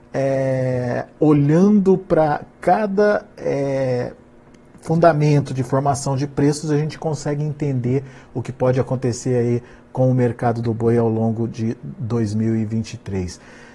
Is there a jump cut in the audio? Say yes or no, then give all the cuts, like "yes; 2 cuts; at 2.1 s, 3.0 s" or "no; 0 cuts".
no; 0 cuts